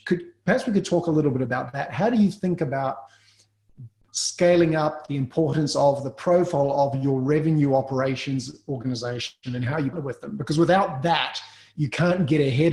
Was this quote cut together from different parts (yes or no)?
yes